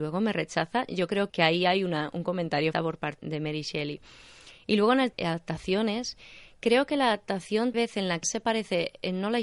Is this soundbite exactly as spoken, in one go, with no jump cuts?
no; 6 cuts; at 1.3 s, 2.7 s, 3.2 s, 5.1 s, 7.7 s, 8.2 s

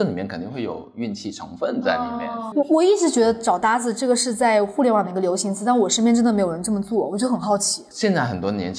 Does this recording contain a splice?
yes; 1 cut; at 2.5 s

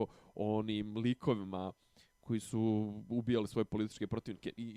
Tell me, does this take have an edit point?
no; 0 cuts

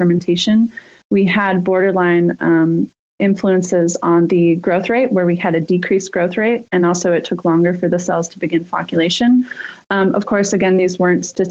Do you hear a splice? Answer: no; 0 cuts

